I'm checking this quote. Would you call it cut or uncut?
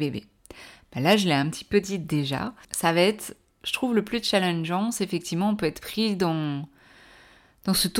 uncut